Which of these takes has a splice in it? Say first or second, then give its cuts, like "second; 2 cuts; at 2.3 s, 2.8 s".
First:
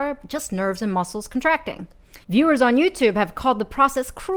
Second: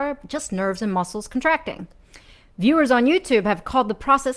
first; 1 cut; at 2.2 s